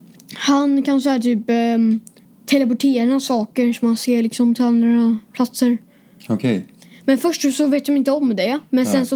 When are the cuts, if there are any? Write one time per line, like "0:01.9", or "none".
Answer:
none